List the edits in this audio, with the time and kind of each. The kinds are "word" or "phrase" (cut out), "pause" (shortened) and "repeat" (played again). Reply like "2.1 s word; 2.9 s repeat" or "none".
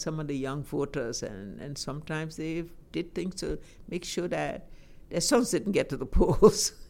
none